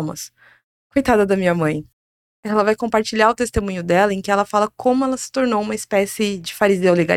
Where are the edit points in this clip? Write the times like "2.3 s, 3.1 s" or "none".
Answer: none